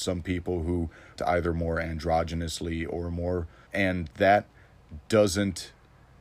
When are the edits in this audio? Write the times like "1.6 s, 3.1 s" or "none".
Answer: 1.2 s, 3.7 s